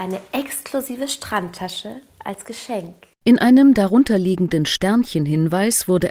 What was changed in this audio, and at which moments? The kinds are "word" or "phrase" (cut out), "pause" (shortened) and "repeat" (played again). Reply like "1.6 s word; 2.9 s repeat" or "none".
3.1 s pause